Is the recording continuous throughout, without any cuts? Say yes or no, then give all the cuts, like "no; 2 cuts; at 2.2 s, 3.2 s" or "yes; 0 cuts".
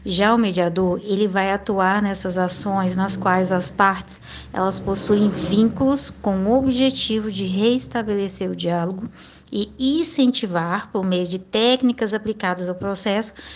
yes; 0 cuts